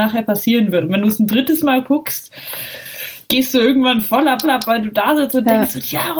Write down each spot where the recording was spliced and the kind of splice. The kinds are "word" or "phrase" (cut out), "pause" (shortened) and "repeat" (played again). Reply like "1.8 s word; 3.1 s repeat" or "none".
3.2 s pause; 4.4 s repeat